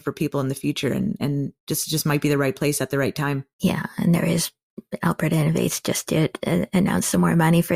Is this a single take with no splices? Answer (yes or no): no